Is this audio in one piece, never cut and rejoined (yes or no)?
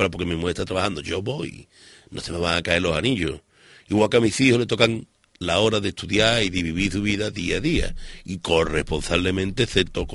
yes